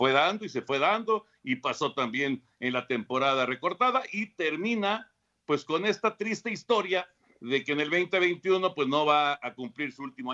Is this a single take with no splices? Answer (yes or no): yes